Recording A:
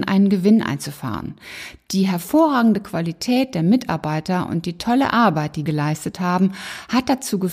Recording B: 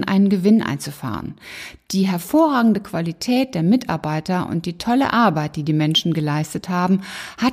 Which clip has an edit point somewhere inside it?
A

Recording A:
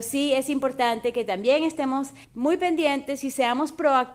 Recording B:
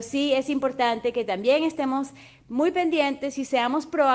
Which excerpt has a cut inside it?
A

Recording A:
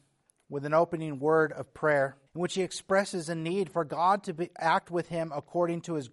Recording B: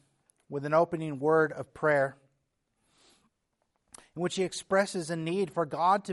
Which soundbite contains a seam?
A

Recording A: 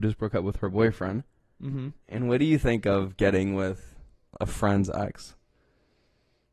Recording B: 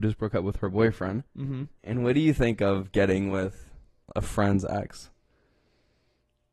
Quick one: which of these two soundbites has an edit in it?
B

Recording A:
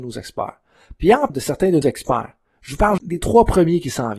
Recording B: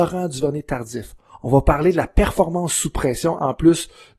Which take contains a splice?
A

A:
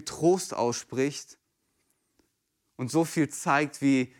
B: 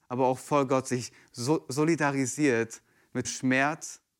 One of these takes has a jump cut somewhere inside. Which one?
B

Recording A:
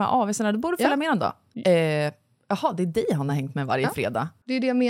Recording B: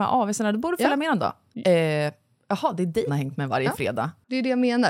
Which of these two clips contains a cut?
B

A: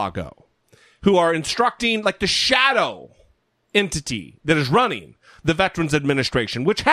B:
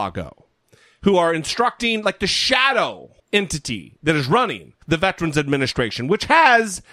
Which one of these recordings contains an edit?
B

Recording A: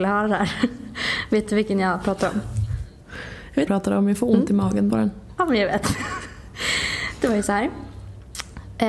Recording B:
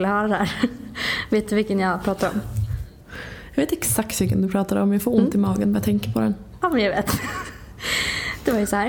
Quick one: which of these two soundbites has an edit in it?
A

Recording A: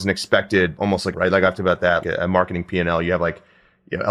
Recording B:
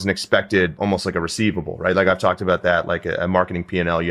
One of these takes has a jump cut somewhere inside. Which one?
A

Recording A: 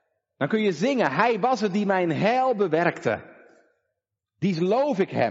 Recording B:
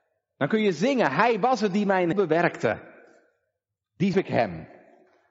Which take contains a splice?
B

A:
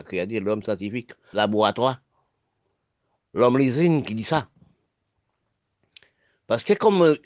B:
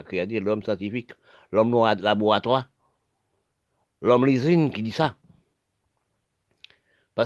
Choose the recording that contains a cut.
A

